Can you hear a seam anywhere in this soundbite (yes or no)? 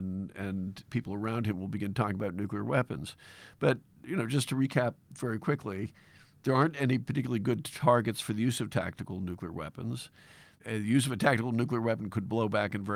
no